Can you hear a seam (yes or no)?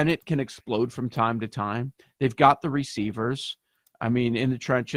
no